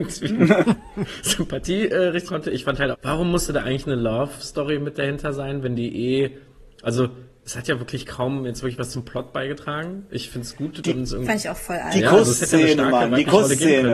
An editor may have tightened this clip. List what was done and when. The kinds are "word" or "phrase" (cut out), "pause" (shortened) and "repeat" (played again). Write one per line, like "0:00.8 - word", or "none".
0:02.3 - word
0:02.9 - phrase

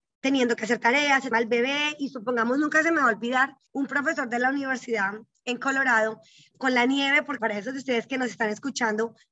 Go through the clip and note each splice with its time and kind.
0:01.3 - phrase
0:03.7 - pause
0:06.5 - word
0:07.4 - word

